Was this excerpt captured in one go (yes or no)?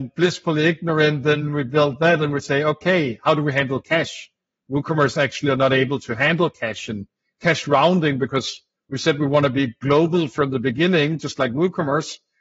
yes